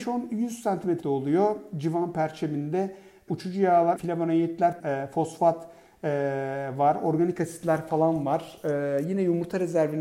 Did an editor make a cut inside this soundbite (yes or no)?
yes